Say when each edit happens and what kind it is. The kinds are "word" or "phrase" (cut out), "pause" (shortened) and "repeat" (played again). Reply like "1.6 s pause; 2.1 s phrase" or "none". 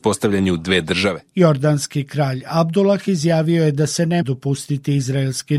4.2 s word